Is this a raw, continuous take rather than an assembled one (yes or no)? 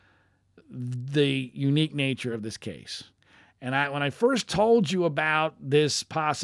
yes